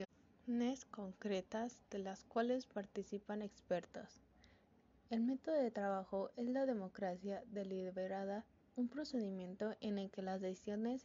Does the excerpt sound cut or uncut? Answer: uncut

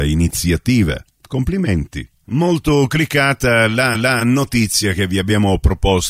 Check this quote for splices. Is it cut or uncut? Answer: cut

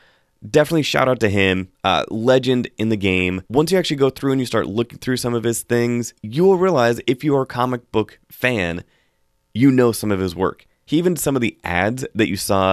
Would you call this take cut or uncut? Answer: cut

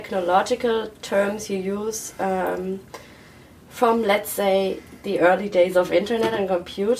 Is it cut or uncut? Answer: uncut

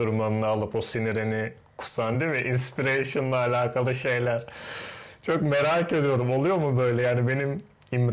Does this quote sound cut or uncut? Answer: uncut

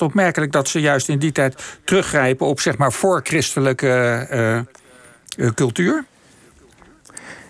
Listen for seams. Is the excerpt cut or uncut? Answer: uncut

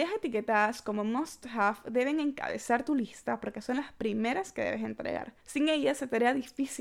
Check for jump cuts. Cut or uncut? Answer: cut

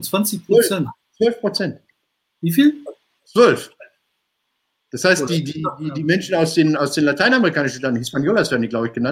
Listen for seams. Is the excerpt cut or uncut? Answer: uncut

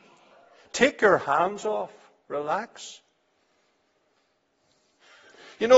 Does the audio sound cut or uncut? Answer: uncut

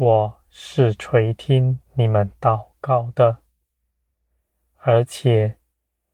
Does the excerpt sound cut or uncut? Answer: uncut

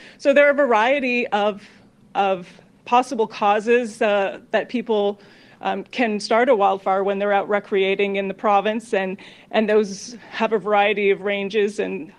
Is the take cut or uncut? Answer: uncut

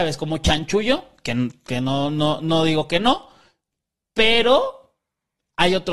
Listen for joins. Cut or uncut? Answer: uncut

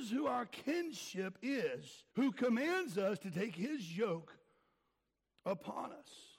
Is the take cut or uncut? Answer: cut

